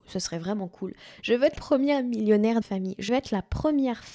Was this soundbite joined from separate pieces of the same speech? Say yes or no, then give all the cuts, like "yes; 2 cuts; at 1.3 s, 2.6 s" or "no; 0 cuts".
yes; 3 cuts; at 1.6 s, 2.6 s, 3.1 s